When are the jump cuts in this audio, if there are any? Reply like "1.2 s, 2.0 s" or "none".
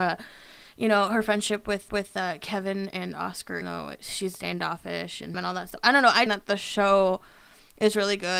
1.9 s, 3.6 s, 4.3 s, 5.3 s, 6.3 s